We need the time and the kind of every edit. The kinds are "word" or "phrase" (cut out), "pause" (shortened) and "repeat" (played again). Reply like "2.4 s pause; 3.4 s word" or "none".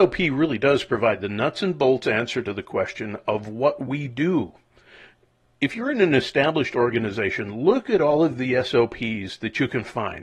none